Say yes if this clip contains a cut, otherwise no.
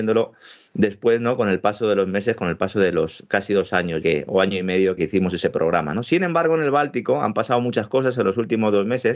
yes